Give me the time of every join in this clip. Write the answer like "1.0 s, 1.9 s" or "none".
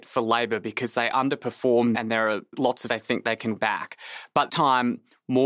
1.9 s, 2.9 s, 3.6 s, 4.5 s